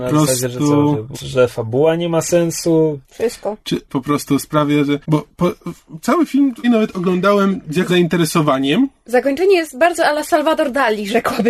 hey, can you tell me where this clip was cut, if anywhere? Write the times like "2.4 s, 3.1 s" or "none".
1.1 s, 3.0 s, 3.9 s, 5.0 s, 6.6 s, 7.9 s